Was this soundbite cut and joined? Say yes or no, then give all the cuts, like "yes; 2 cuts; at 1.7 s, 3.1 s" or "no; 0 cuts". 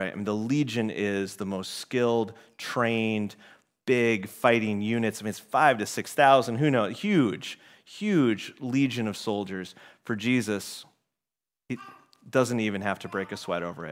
no; 0 cuts